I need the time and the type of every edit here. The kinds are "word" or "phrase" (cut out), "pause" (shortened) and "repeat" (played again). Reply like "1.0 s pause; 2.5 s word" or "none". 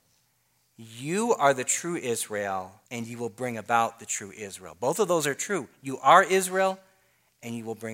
2.9 s pause